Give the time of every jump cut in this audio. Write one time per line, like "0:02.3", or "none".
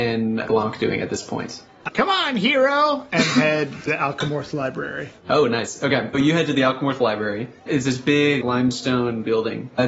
0:01.9
0:03.9
0:06.1
0:07.7
0:08.4